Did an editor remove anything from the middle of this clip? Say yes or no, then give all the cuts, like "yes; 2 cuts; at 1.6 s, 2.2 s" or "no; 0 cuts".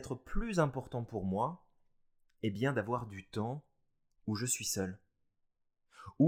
no; 0 cuts